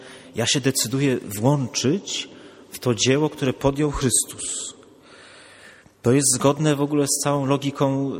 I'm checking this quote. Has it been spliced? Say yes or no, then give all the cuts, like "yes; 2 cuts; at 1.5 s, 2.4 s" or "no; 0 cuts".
no; 0 cuts